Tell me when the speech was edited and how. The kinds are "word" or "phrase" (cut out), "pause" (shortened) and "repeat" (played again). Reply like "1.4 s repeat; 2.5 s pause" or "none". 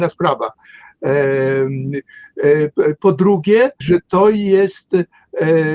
3.8 s word